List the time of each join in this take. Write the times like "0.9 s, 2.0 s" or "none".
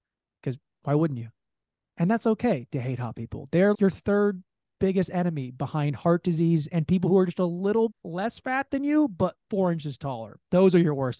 3.7 s, 7.9 s